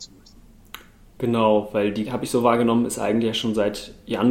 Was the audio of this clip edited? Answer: yes; 1 cut; at 2.0 s

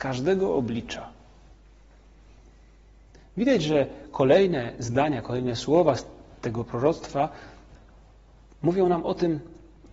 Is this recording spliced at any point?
no; 0 cuts

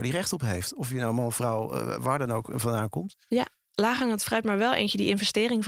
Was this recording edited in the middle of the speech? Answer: no; 0 cuts

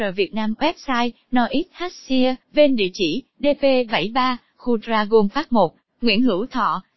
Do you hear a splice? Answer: yes; 1 cut; at 2.4 s

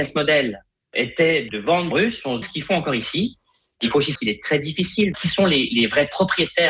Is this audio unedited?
no; 4 cuts; at 1.9 s, 2.4 s, 4.1 s, 5.1 s

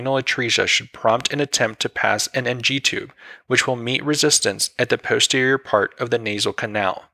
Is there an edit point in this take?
no; 0 cuts

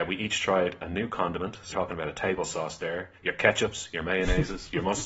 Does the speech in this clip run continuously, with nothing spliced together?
no; 1 cut; at 1.7 s

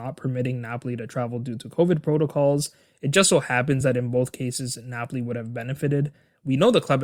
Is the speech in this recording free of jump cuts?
yes; 0 cuts

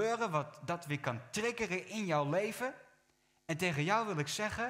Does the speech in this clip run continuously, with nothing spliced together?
yes; 0 cuts

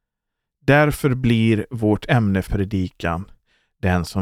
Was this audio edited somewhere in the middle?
yes; 1 cut; at 2.5 s

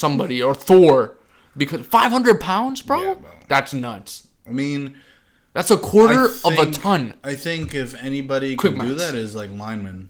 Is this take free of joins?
yes; 0 cuts

